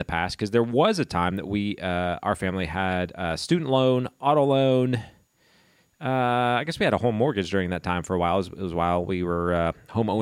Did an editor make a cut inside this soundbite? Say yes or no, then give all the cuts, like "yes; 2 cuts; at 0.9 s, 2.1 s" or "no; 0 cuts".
no; 0 cuts